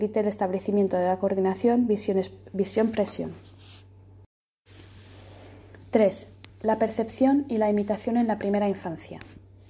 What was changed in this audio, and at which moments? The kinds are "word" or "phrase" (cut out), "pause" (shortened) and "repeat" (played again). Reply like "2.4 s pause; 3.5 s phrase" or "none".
6.5 s pause